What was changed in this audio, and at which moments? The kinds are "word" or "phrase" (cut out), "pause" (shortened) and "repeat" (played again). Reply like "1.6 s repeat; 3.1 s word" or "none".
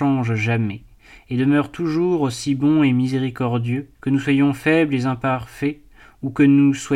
3.9 s pause